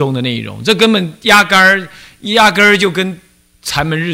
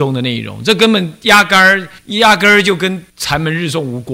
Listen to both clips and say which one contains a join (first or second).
second